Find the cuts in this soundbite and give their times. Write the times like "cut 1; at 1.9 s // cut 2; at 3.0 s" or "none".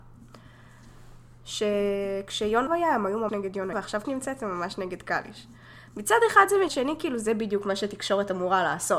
cut 1; at 2.7 s // cut 2; at 3.3 s // cut 3; at 3.7 s // cut 4; at 4.0 s // cut 5; at 6.7 s